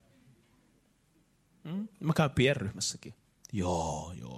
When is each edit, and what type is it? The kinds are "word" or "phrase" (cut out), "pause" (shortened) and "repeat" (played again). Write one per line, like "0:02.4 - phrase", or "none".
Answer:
none